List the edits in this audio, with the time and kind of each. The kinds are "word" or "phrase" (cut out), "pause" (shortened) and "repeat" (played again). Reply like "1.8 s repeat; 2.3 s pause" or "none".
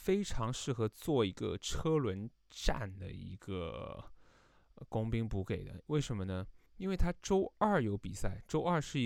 6.7 s pause

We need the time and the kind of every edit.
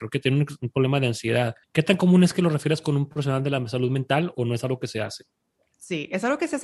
1.6 s pause

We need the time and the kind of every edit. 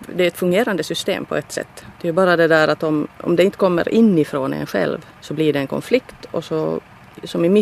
1.9 s pause; 3.1 s pause; 5.1 s pause

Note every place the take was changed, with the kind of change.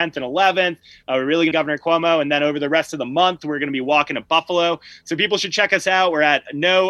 1.5 s phrase

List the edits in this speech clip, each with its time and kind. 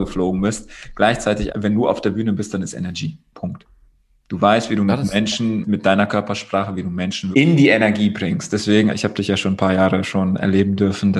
1.5 s word; 5.6 s word; 7.3 s word; 8.9 s word

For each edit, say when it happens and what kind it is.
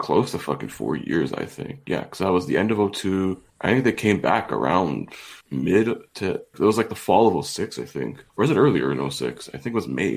3.5 s pause; 5.4 s pause; 6.5 s word; 8.3 s pause

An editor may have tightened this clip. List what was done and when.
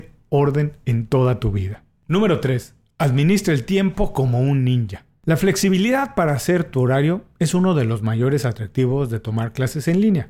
none

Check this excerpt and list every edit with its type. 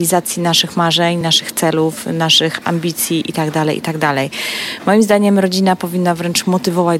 none

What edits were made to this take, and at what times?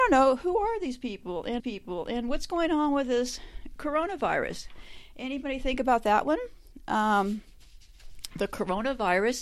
1.6 s repeat

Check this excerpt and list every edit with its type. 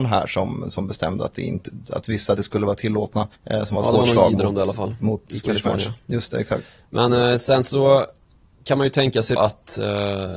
2.4 s phrase; 3.4 s pause; 9.4 s word

